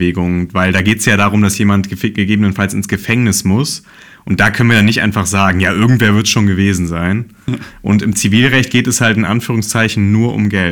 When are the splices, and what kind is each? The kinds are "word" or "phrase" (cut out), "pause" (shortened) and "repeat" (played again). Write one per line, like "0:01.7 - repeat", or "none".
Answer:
none